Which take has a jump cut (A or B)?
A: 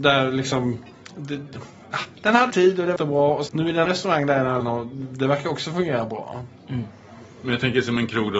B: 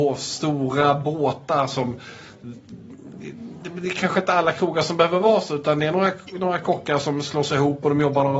A